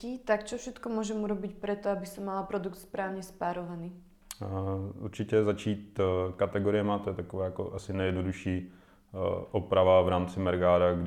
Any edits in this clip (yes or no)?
no